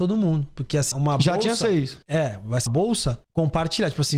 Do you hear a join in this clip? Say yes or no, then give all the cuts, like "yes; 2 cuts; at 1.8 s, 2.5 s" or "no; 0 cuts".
yes; 4 cuts; at 0.9 s, 2.0 s, 2.7 s, 3.2 s